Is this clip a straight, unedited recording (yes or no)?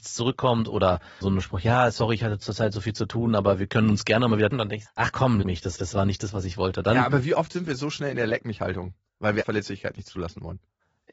no